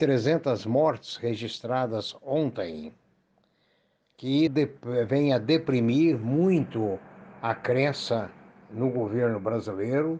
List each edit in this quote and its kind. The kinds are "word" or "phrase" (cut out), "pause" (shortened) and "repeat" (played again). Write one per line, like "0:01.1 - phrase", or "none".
0:04.5 - word

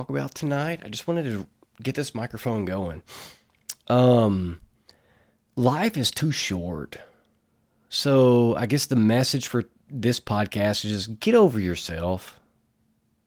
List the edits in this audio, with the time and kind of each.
none

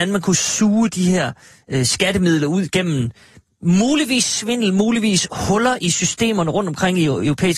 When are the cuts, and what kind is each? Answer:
none

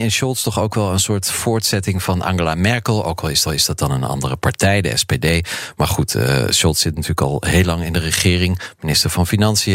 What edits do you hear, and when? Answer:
0:03.4 - repeat

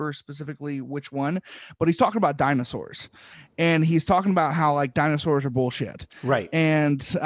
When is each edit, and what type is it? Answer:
none

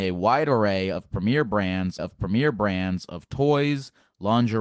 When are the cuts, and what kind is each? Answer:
0:02.0 - repeat

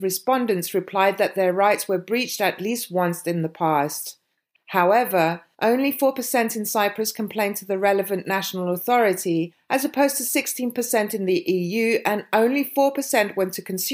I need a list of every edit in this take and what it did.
none

